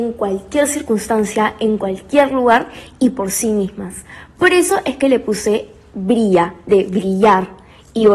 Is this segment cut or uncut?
uncut